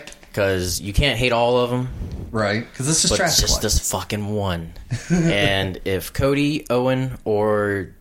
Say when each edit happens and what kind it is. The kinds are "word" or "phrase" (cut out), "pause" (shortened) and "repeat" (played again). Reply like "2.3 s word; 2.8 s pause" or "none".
none